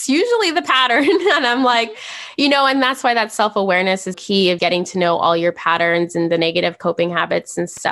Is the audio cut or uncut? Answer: cut